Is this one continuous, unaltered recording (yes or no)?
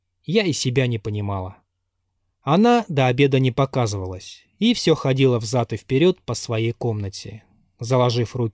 yes